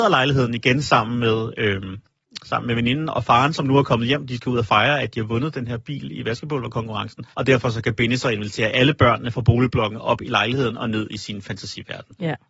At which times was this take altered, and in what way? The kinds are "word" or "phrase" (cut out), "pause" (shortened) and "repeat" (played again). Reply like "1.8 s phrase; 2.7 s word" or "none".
7.3 s pause

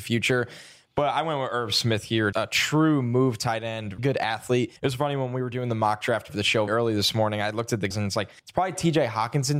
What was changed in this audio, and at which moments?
2.3 s word; 4.0 s word; 4.8 s pause; 6.3 s phrase; 6.7 s word; 7.9 s word; 8.4 s pause

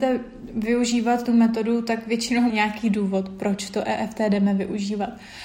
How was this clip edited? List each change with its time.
1.3 s word; 2.5 s word

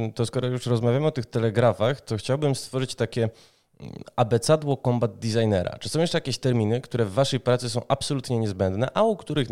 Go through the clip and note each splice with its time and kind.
none

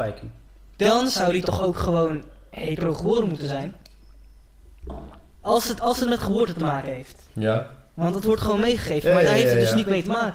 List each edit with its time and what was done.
7.3 s pause

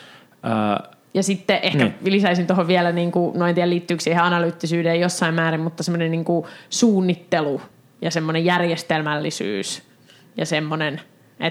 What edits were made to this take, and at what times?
none

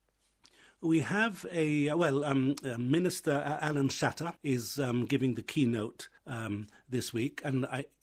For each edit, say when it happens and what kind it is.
4.4 s pause; 6.2 s pause

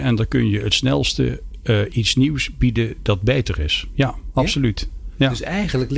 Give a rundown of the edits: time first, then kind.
none

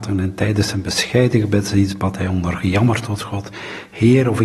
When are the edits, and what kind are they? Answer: none

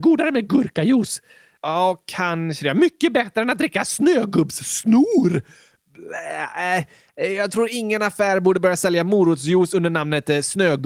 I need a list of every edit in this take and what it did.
none

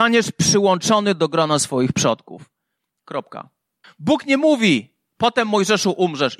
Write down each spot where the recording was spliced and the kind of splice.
3.8 s pause

